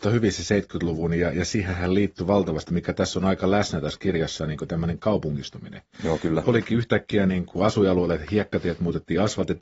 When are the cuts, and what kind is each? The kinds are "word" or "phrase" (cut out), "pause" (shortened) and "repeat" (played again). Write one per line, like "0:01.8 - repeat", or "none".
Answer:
none